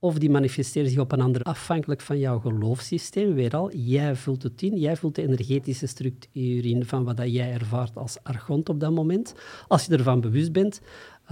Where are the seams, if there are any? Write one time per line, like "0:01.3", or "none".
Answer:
0:01.4